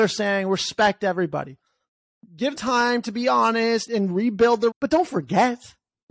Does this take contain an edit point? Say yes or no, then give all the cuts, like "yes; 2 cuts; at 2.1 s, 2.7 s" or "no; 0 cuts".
yes; 3 cuts; at 2.6 s, 3.9 s, 4.7 s